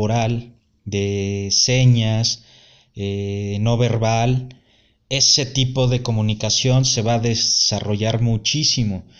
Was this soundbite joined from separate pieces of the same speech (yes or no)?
no